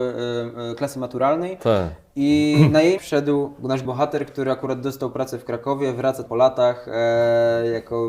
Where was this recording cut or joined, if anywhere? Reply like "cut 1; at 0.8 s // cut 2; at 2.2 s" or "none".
cut 1; at 3.0 s // cut 2; at 3.8 s // cut 3; at 6.3 s